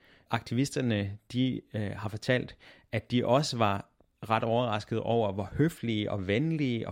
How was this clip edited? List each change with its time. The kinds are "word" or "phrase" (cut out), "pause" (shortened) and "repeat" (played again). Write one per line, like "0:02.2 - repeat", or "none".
none